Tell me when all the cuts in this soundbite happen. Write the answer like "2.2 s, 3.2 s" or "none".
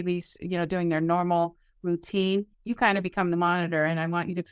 2.5 s